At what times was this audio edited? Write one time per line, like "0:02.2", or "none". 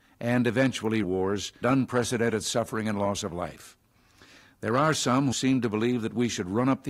0:01.0
0:01.6
0:05.3